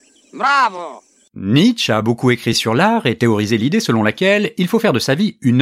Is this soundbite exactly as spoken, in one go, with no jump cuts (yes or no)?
yes